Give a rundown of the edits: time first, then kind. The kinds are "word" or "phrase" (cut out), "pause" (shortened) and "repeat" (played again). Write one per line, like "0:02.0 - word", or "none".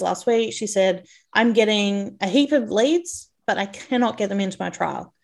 none